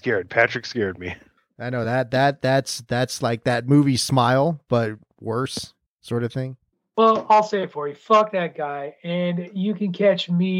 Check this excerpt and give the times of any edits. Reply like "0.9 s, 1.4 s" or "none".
none